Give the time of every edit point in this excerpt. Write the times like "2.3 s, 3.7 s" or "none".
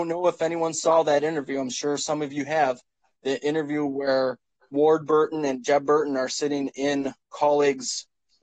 none